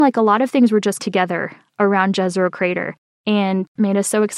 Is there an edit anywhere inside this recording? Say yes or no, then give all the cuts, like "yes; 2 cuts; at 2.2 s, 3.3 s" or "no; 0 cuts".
yes; 1 cut; at 1.0 s